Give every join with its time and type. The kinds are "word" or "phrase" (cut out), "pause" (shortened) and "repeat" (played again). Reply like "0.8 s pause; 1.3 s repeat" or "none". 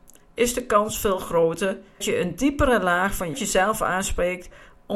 2.0 s word; 3.3 s phrase